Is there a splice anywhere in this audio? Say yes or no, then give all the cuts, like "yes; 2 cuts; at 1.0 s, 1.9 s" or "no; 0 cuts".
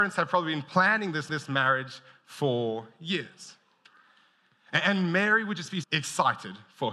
yes; 2 cuts; at 1.3 s, 5.8 s